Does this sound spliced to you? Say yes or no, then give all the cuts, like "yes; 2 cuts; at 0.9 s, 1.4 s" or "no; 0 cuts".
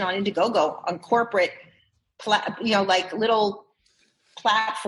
no; 0 cuts